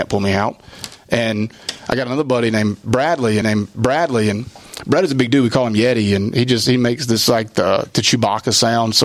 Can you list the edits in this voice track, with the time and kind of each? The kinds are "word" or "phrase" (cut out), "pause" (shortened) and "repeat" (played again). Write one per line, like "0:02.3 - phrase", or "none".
0:03.4 - repeat